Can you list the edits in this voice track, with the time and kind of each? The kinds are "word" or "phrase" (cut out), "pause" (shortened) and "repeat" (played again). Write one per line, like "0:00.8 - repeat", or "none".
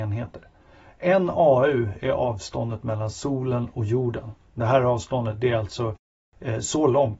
none